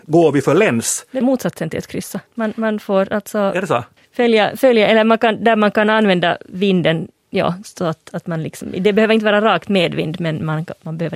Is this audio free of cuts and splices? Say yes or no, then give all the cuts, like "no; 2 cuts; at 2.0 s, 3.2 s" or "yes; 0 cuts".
no; 3 cuts; at 1.2 s, 2.3 s, 4.0 s